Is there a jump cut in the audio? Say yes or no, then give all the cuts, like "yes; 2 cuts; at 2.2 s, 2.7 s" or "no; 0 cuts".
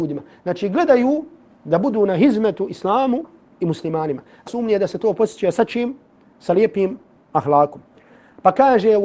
yes; 1 cut; at 4.5 s